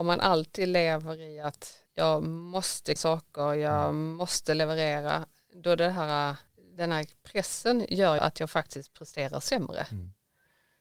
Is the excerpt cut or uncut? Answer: cut